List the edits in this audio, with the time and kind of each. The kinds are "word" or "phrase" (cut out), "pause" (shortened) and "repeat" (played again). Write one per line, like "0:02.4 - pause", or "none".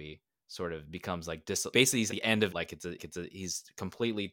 0:01.7 - word
0:02.1 - word
0:02.5 - phrase
0:03.0 - repeat